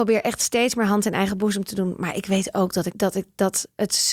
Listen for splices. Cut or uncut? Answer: cut